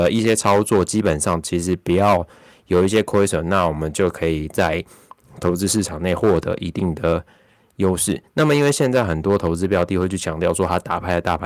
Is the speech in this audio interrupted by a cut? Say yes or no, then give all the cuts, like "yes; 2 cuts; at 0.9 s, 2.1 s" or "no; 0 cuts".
no; 0 cuts